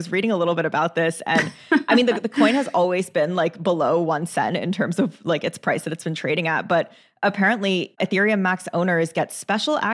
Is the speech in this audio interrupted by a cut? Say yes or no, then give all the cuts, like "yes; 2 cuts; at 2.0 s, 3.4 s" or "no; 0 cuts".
no; 0 cuts